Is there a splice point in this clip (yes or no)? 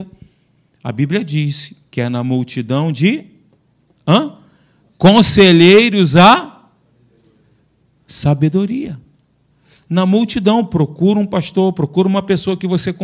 no